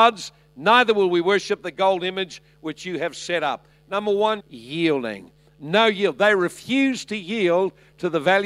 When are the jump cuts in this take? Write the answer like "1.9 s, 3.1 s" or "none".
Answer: 4.4 s